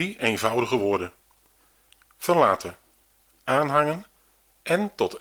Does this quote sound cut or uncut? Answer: uncut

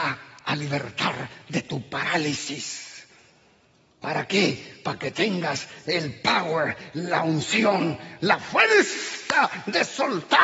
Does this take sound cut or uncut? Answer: uncut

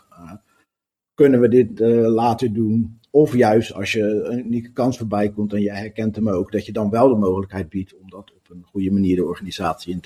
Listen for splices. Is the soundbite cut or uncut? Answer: uncut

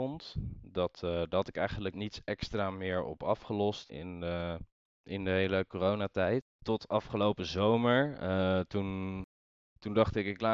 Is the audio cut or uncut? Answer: cut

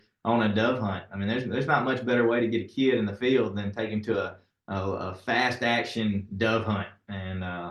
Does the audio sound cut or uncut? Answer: uncut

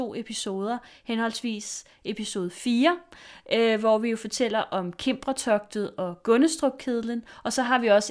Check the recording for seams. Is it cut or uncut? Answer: uncut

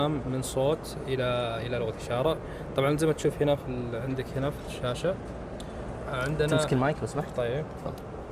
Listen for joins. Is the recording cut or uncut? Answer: uncut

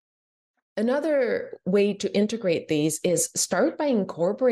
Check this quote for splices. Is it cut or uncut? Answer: uncut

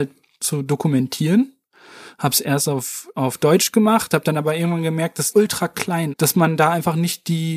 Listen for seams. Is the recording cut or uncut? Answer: cut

